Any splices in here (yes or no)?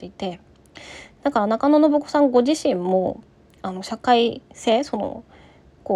no